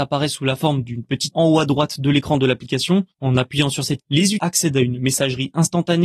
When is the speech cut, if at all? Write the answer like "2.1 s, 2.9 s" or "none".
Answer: 1.3 s, 3.1 s, 4.0 s, 4.4 s